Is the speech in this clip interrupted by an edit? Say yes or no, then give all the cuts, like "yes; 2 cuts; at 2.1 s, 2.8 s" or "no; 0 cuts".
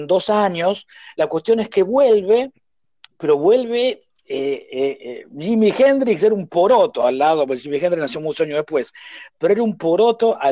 no; 0 cuts